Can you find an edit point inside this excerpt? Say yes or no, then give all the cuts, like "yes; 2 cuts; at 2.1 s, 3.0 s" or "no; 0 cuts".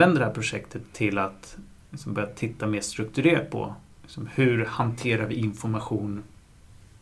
no; 0 cuts